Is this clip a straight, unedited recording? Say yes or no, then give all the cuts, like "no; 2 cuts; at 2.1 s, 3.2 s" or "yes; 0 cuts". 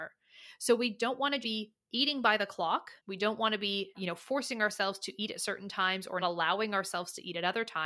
no; 4 cuts; at 1.4 s, 3.0 s, 3.9 s, 6.2 s